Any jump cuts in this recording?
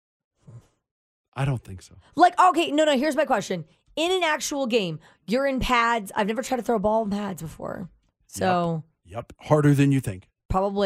no; 0 cuts

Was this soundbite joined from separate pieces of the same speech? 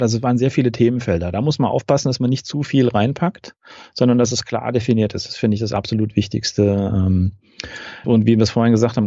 yes; 1 cut; at 8.0 s

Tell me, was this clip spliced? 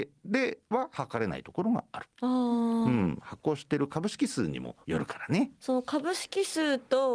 yes; 2 cuts; at 2.1 s, 4.8 s

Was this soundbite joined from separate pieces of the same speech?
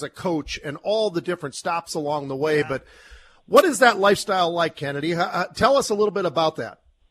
no; 0 cuts

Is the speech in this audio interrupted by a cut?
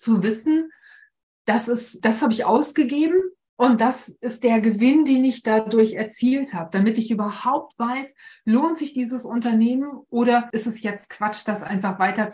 no; 0 cuts

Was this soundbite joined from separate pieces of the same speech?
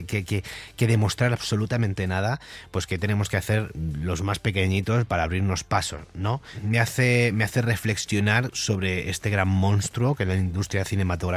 no; 0 cuts

